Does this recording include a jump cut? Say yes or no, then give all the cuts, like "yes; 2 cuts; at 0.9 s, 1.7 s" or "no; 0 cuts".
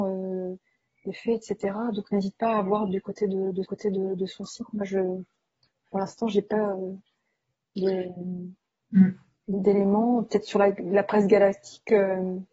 yes; 1 cut; at 3.6 s